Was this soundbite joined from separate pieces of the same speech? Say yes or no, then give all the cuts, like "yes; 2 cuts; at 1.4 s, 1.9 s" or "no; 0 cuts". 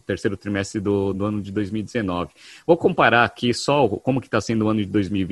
no; 0 cuts